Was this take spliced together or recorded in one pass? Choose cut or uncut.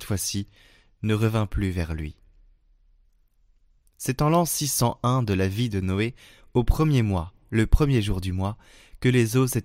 uncut